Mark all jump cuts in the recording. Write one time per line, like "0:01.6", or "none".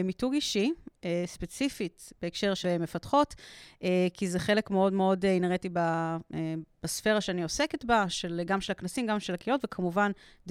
0:02.6